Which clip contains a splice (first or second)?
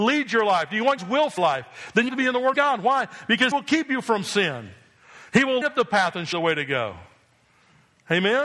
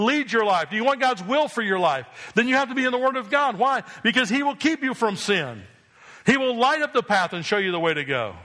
first